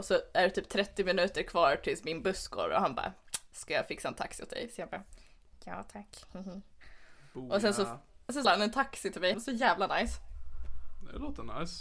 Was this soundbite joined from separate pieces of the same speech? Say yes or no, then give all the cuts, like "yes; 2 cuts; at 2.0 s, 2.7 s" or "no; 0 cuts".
yes; 2 cuts; at 8.4 s, 9.3 s